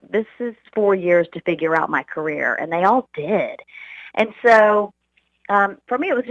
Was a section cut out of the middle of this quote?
no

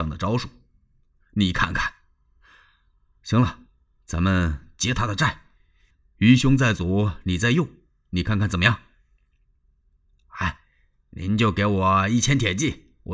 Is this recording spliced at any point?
no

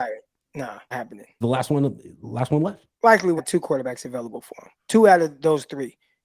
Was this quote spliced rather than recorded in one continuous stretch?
yes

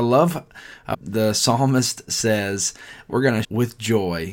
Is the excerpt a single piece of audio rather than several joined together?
no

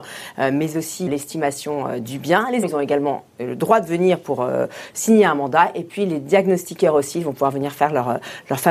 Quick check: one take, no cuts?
no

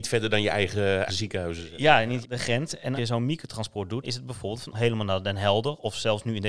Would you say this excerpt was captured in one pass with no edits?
no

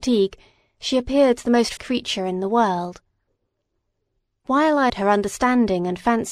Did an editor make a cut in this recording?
yes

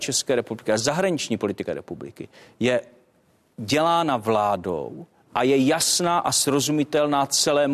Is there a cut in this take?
yes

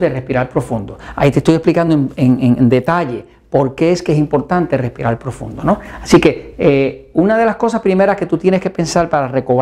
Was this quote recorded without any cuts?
yes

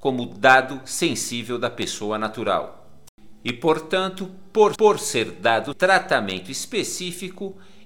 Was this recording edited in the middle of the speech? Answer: yes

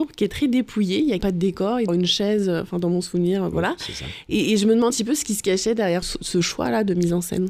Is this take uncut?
no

